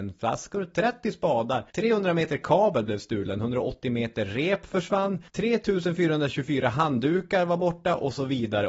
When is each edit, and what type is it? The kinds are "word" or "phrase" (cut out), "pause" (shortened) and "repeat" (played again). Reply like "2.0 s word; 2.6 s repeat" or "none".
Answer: 1.7 s pause; 5.3 s pause